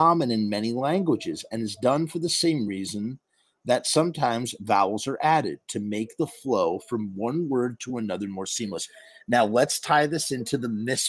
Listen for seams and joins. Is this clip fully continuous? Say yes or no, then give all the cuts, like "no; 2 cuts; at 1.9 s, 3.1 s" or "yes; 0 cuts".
yes; 0 cuts